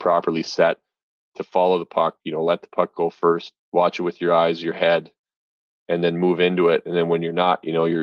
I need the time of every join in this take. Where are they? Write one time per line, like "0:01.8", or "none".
0:03.6